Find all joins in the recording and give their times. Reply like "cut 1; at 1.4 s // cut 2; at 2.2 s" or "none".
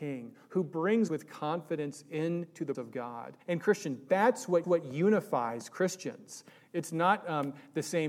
cut 1; at 1.1 s // cut 2; at 2.7 s // cut 3; at 3.4 s // cut 4; at 4.6 s